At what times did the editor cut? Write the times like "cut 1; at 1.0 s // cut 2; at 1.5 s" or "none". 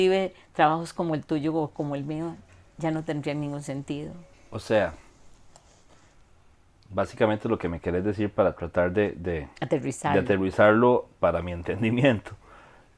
cut 1; at 4.3 s // cut 2; at 9.6 s

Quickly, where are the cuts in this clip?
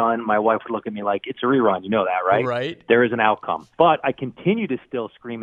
cut 1; at 3.7 s

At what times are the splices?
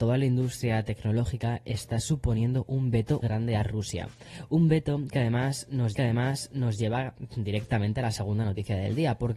cut 1; at 3.2 s // cut 2; at 5.9 s

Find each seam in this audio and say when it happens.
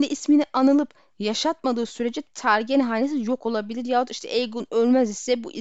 none

